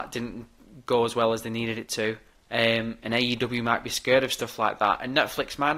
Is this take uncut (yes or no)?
no